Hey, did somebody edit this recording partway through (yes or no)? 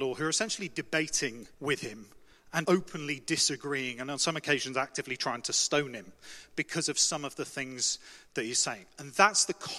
yes